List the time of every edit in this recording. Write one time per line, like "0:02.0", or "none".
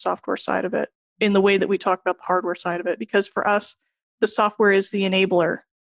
none